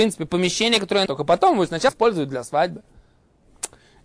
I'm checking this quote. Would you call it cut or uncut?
cut